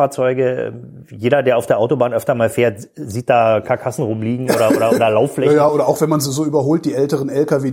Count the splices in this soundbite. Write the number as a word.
zero